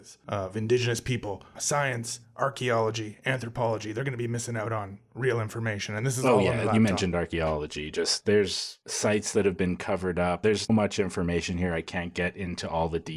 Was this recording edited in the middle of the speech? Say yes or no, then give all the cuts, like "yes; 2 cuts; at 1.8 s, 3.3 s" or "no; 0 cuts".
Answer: yes; 1 cut; at 10.7 s